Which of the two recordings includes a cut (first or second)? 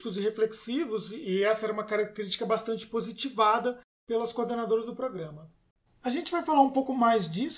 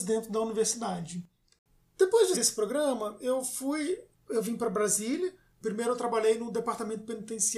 second